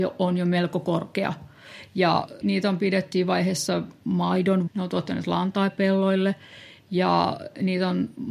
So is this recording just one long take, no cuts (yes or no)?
no